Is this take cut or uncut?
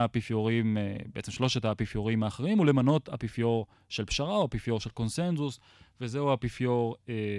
uncut